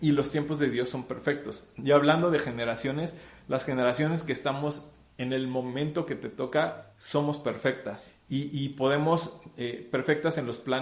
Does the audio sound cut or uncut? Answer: uncut